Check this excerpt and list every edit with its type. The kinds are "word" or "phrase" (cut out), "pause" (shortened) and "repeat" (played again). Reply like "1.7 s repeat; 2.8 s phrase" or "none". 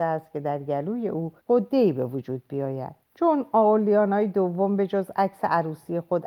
1.4 s pause; 3.0 s pause

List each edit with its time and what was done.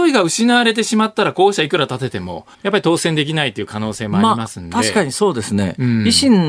2.5 s pause

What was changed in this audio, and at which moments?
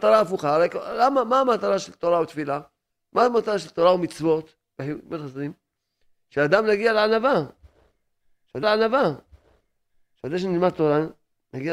2.9 s pause; 8.6 s repeat

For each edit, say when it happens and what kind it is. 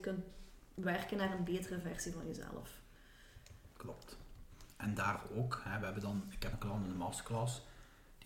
3.7 s pause; 6.5 s word

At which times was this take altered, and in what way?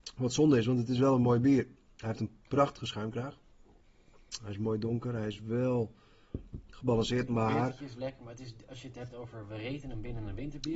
none

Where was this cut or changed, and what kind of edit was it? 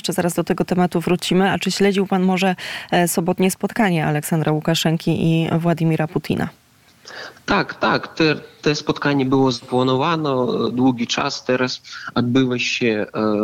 none

